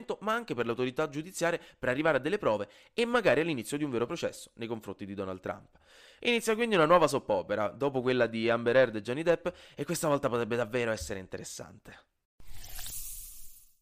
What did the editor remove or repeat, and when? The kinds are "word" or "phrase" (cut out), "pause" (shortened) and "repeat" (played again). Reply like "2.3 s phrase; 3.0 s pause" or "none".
none